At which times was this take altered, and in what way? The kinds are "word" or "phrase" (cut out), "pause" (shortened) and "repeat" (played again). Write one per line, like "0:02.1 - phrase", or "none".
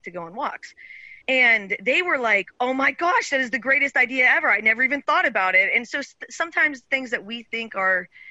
0:01.2 - pause